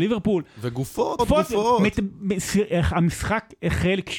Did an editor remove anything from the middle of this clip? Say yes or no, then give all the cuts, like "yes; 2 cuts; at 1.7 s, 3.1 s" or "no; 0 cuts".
yes; 1 cut; at 1.2 s